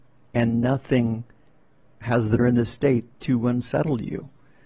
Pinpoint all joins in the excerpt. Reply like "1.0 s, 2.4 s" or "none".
2.4 s